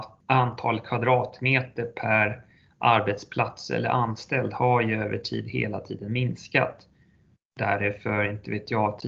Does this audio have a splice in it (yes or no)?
no